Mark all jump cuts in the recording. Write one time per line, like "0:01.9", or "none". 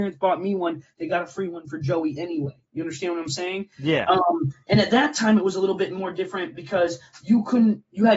none